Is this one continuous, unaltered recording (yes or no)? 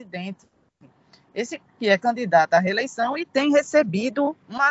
yes